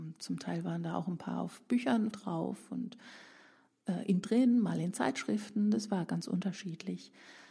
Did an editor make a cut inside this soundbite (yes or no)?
yes